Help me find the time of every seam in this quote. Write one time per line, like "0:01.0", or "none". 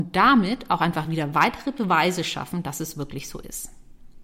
none